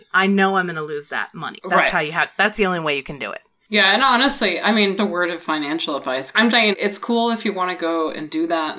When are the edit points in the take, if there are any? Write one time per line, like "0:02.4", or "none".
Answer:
0:05.0
0:06.5